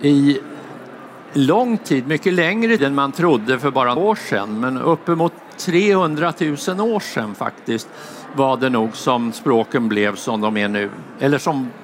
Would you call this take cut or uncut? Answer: cut